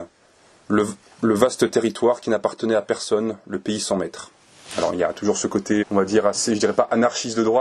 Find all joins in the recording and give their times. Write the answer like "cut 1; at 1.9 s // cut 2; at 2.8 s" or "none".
cut 1; at 5.8 s